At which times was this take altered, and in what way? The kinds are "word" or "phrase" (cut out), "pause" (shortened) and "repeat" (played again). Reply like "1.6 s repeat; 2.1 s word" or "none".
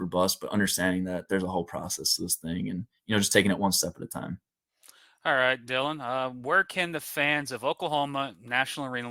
none